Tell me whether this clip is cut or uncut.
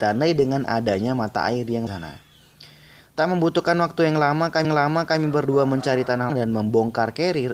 cut